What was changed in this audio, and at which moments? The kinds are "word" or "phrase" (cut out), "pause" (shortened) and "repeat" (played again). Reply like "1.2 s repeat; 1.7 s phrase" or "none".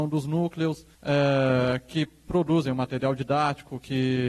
0.9 s pause